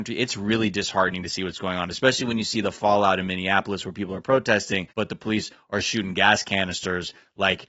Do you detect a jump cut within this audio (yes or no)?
yes